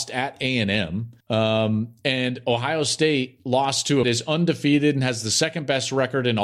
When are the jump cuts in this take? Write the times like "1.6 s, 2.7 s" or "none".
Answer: 1.2 s, 4.0 s